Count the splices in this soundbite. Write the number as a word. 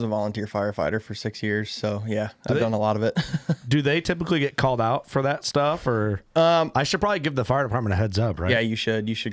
zero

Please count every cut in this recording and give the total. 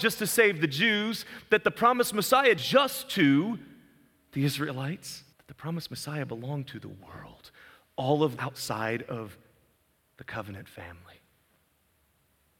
three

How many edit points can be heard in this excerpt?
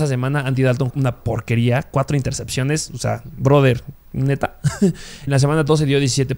two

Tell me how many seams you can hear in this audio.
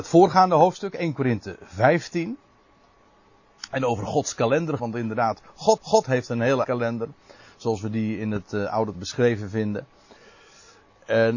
four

